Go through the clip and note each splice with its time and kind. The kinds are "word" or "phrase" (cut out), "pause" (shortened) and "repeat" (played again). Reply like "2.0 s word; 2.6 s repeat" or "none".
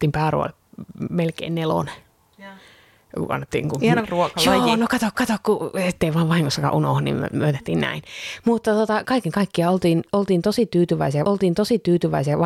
4.0 s phrase; 5.1 s repeat; 9.0 s word; 11.2 s repeat

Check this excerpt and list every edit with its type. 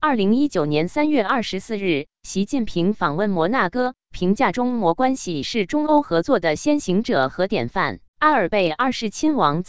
8.1 s pause

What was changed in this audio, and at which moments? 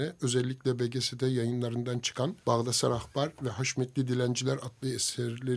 2.4 s pause

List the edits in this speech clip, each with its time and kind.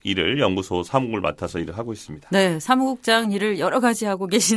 none

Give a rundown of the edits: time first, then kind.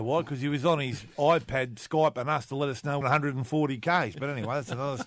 3.0 s phrase

